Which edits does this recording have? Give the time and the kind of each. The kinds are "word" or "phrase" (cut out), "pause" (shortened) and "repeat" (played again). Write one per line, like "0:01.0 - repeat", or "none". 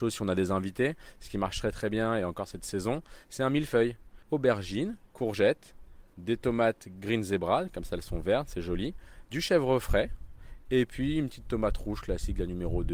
0:05.0 - pause
0:08.5 - word